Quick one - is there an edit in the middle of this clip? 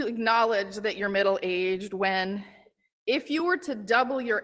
no; 0 cuts

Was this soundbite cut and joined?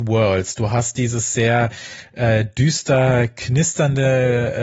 no; 0 cuts

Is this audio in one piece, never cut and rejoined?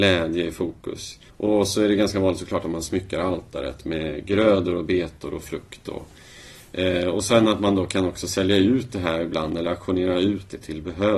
no; 1 cut; at 1.3 s

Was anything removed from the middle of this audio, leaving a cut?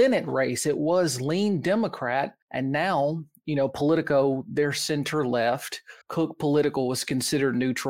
yes; 2 cuts; at 2.4 s, 6.0 s

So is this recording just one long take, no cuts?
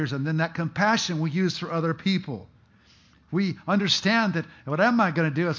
yes; 0 cuts

